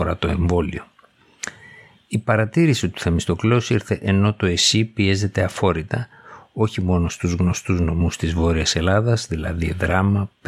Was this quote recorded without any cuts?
yes; 0 cuts

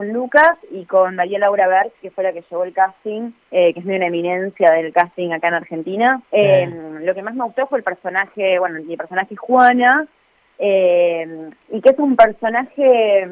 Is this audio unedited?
no; 3 cuts; at 3.4 s, 6.2 s, 11.6 s

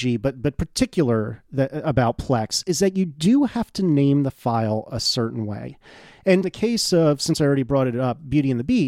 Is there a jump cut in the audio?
yes; 1 cut; at 6.4 s

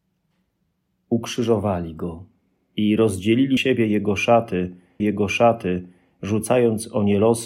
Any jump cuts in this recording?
yes; 3 cuts; at 2.5 s, 3.6 s, 5.0 s

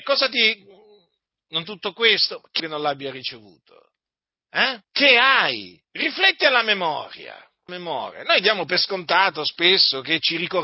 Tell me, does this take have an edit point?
yes; 5 cuts; at 1.6 s, 2.6 s, 4.8 s, 5.8 s, 7.7 s

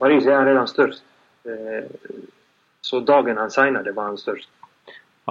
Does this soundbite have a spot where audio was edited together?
no; 0 cuts

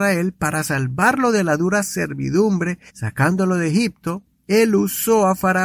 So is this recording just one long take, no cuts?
no; 2 cuts; at 2.9 s, 4.3 s

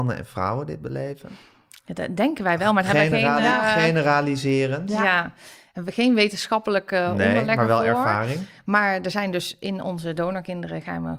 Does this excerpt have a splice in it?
no; 0 cuts

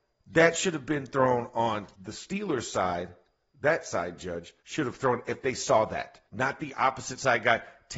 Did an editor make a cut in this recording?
yes; 3 cuts; at 1.9 s, 4.6 s, 6.3 s

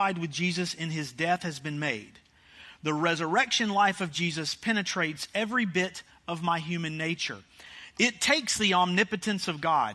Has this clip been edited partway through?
no; 0 cuts

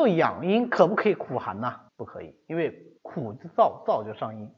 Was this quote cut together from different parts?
yes; 2 cuts; at 1.9 s, 3.0 s

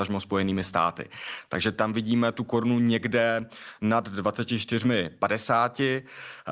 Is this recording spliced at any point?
no; 0 cuts

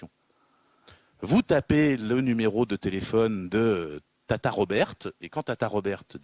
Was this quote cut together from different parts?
no; 0 cuts

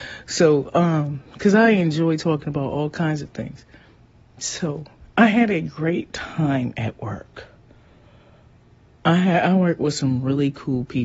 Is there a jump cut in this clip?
no; 0 cuts

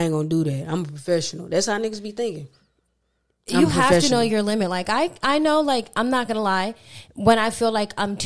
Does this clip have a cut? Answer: no; 0 cuts

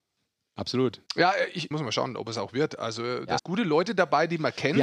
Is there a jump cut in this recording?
yes; 3 cuts; at 1.1 s, 1.7 s, 3.4 s

